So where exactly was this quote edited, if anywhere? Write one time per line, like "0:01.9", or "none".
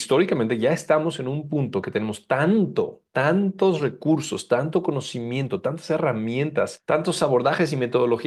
none